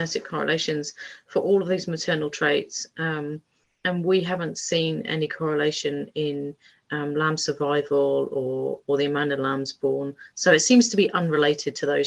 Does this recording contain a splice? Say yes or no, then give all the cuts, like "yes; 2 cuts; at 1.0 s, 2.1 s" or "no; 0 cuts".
no; 0 cuts